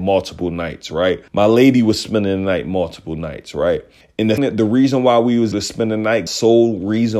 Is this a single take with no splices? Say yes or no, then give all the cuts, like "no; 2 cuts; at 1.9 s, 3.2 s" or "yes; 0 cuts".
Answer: no; 5 cuts; at 1.3 s, 4.0 s, 4.4 s, 5.5 s, 6.3 s